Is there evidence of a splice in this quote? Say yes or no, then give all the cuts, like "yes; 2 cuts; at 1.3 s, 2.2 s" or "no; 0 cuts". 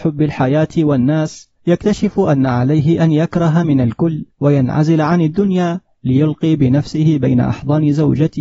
yes; 3 cuts; at 1.5 s, 3.6 s, 4.3 s